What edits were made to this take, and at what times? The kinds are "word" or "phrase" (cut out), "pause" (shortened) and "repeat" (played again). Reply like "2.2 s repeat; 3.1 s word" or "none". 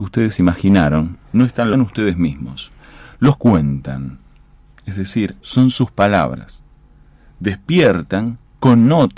1.3 s pause; 1.7 s phrase; 3.4 s phrase; 5.4 s pause